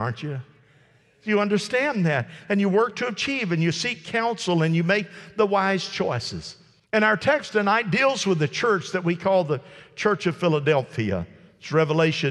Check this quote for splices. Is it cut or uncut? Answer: cut